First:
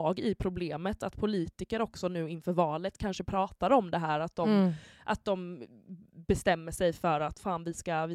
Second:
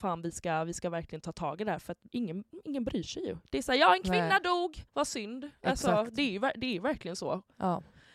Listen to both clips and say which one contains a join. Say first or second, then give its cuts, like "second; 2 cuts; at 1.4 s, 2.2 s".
second; 2 cuts; at 2.1 s, 4.9 s